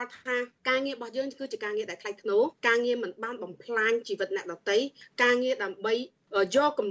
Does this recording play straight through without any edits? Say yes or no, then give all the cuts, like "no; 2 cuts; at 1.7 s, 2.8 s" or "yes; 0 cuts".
no; 1 cut; at 2.6 s